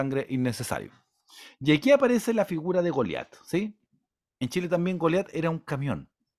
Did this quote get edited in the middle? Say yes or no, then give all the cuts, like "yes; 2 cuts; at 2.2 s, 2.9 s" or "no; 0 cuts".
no; 0 cuts